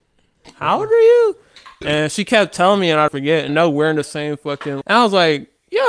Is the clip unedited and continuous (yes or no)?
no